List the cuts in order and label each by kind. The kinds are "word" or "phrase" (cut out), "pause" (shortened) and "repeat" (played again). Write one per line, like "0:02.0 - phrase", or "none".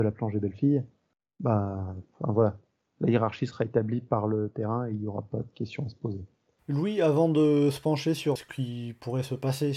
0:08.4 - word